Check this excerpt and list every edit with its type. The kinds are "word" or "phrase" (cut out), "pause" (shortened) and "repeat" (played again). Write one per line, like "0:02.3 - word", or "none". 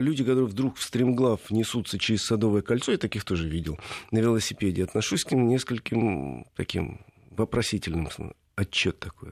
none